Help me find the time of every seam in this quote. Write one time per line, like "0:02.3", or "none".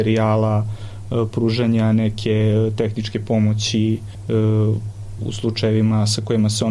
0:05.2